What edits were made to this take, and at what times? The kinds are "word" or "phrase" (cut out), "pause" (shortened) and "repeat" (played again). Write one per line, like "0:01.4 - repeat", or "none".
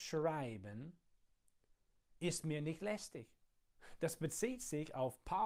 none